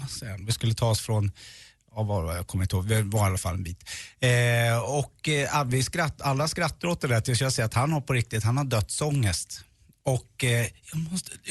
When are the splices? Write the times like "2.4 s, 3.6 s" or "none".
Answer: none